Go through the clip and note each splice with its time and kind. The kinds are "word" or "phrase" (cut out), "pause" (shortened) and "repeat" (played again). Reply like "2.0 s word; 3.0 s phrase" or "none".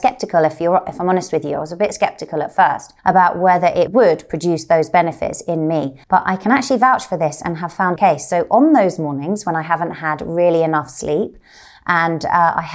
3.0 s pause; 3.9 s word; 6.0 s pause; 8.0 s phrase